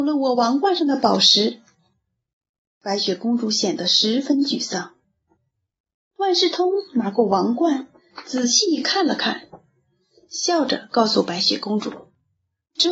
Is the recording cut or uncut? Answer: uncut